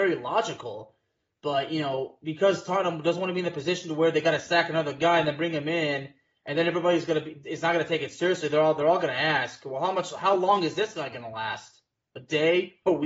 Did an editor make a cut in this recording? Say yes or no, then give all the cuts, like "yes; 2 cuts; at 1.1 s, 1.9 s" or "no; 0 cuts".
no; 0 cuts